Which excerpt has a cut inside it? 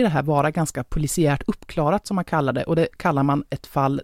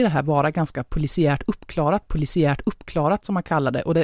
second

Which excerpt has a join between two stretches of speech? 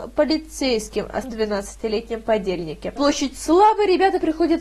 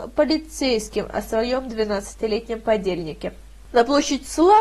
first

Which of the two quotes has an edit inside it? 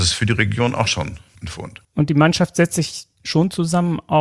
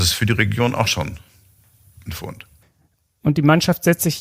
first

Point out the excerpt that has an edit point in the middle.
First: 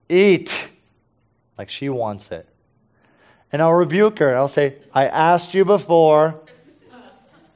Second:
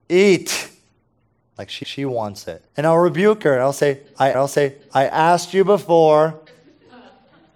second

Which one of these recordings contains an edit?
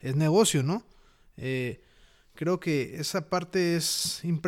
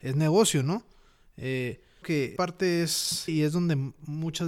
second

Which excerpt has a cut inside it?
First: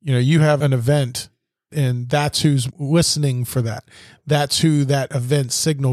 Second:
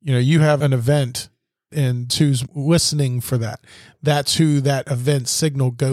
second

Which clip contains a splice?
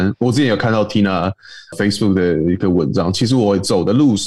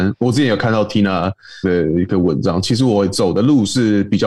second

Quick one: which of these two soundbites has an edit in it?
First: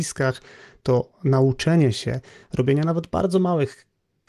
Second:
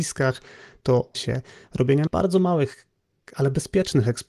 second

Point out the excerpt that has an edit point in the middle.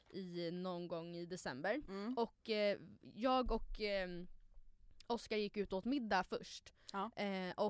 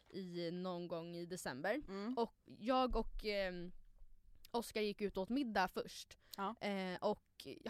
second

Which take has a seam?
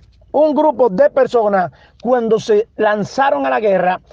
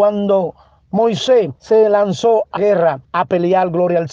second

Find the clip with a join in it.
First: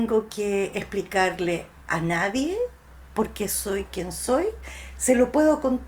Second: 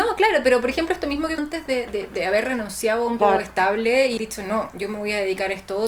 second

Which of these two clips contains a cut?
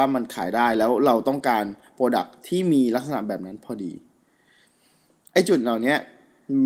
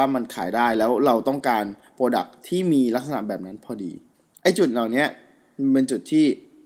second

